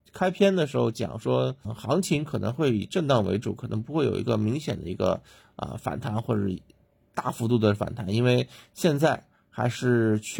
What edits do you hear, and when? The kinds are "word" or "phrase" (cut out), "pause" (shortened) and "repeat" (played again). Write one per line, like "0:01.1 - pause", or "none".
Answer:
0:01.6 - word